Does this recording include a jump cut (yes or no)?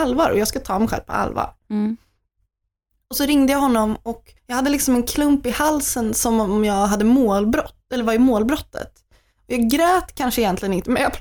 yes